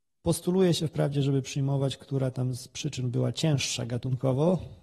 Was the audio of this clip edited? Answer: no; 0 cuts

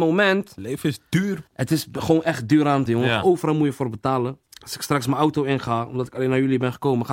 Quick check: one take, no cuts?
no; 3 cuts; at 1.5 s, 2.9 s, 4.5 s

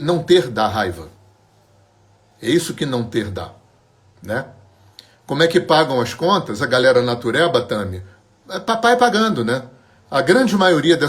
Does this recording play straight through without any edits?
yes; 0 cuts

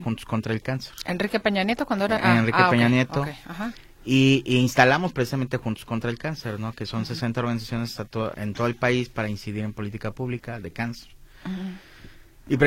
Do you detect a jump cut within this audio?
yes; 2 cuts; at 2.2 s, 8.3 s

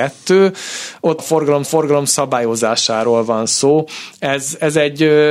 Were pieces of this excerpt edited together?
yes; 2 cuts; at 1.2 s, 1.6 s

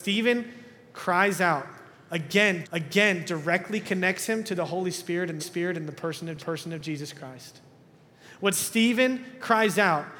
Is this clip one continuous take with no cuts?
no; 3 cuts; at 2.6 s, 5.4 s, 6.4 s

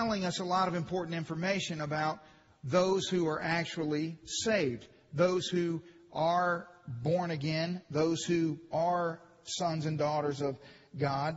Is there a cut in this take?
no; 0 cuts

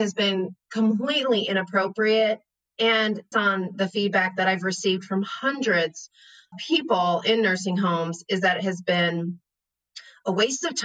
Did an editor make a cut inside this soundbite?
yes; 2 cuts; at 3.3 s, 6.5 s

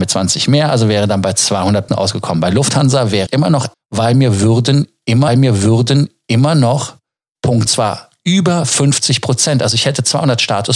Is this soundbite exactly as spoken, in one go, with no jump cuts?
no; 5 cuts; at 1.9 s, 3.3 s, 3.7 s, 5.3 s, 7.7 s

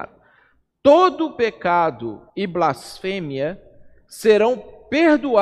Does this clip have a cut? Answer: yes; 1 cut; at 2.3 s

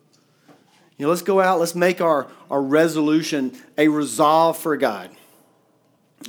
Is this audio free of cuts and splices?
yes; 0 cuts

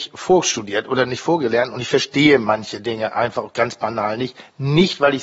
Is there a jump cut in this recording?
no; 0 cuts

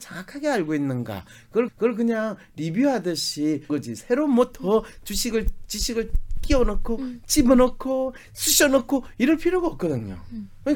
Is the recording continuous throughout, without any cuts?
no; 2 cuts; at 1.7 s, 3.7 s

